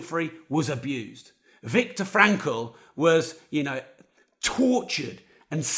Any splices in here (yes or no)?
no